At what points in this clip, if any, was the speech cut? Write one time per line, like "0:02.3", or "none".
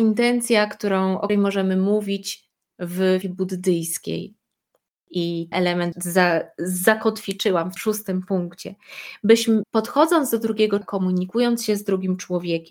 0:01.3
0:03.2
0:05.5
0:05.9
0:07.8
0:09.6
0:10.8

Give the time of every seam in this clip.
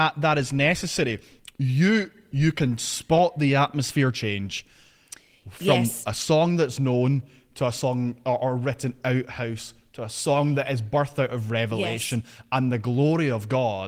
none

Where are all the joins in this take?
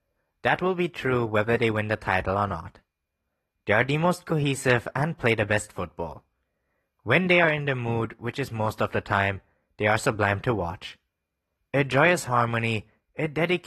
none

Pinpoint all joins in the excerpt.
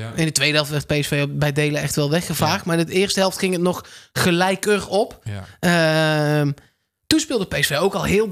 none

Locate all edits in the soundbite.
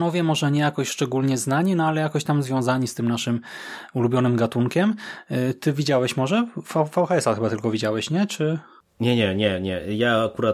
none

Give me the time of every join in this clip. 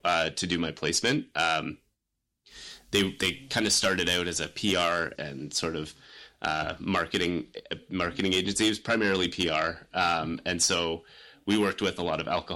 0:05.1

